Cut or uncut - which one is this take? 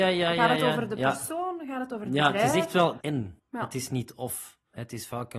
cut